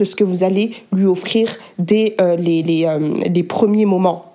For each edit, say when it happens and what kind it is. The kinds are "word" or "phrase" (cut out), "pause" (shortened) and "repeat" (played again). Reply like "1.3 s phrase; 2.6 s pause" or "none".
none

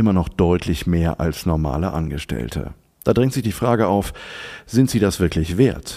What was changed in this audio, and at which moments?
none

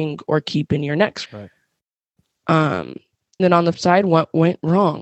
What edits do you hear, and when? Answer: 1.3 s word; 3.4 s word; 3.7 s word

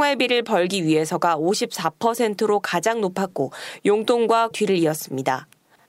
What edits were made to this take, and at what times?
4.5 s word

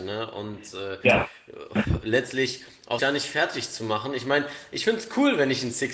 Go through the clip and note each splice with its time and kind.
3.0 s word

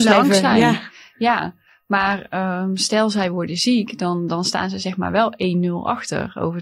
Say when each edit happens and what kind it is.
none

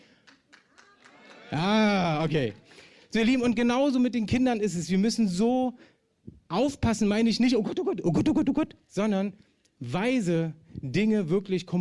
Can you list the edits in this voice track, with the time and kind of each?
none

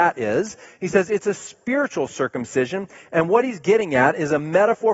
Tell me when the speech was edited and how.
none

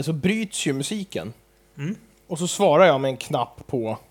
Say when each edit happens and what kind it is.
none

